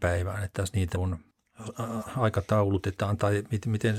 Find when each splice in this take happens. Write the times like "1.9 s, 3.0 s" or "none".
0.9 s